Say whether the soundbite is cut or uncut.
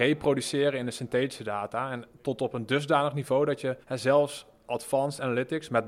cut